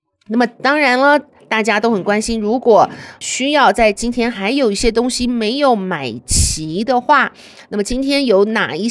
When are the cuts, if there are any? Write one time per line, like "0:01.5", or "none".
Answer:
none

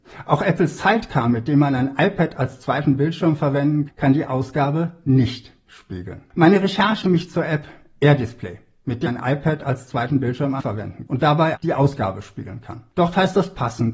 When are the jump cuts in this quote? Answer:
0:03.9
0:07.0
0:09.1
0:10.6
0:11.1
0:11.5

